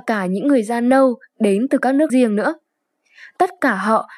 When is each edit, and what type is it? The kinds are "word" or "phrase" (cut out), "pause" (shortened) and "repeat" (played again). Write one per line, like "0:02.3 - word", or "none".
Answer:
0:02.1 - word